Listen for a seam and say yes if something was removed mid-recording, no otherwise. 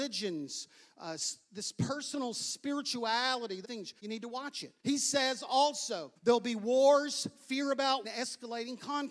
yes